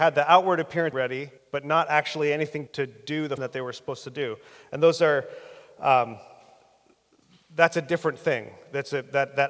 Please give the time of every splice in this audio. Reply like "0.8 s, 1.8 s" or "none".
0.9 s, 1.4 s, 2.7 s, 3.4 s